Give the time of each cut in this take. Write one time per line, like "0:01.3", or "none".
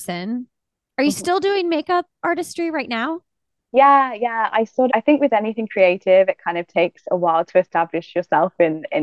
0:04.9